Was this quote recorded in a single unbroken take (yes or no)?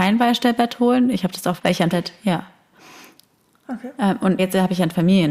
no